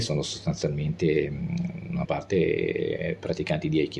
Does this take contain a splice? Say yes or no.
yes